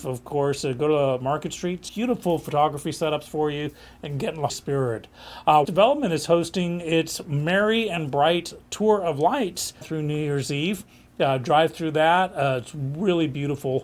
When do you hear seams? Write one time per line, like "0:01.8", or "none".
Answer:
0:01.9
0:04.5
0:05.6
0:09.8